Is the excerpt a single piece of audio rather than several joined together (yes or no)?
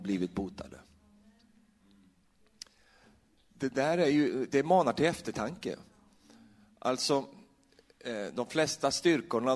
yes